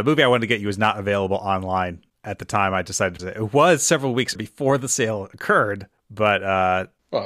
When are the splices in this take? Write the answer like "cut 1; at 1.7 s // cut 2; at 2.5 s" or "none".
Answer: cut 1; at 3.2 s // cut 2; at 4.4 s